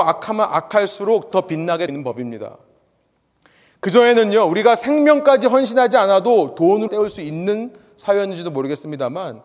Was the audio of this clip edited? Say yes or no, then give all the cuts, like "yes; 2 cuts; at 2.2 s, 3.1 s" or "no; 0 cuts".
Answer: yes; 3 cuts; at 1.3 s, 1.9 s, 6.9 s